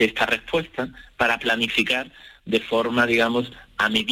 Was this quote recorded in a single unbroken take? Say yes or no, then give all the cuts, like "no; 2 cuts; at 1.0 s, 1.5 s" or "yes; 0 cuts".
yes; 0 cuts